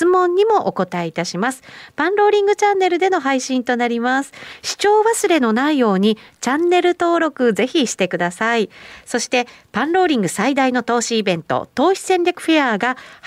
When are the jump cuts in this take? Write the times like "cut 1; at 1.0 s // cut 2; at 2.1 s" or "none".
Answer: none